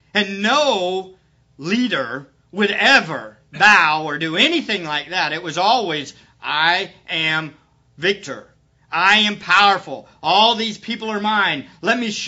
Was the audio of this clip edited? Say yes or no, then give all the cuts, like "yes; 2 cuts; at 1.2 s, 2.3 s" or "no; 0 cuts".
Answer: no; 0 cuts